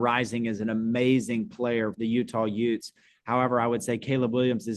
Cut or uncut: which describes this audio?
cut